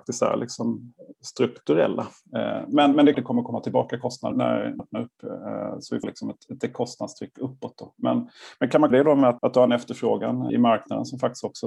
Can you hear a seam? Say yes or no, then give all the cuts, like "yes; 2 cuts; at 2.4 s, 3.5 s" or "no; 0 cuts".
yes; 8 cuts; at 3.1 s, 4.3 s, 4.8 s, 6.0 s, 6.6 s, 8.9 s, 9.4 s, 10.5 s